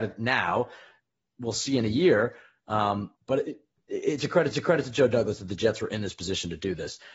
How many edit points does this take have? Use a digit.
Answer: 2